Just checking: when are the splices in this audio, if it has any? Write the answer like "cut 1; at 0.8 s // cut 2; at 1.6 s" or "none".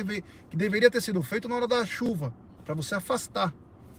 cut 1; at 2.6 s